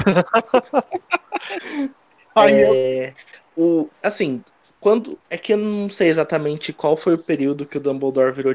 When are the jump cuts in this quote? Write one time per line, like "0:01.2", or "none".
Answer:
0:03.9
0:05.2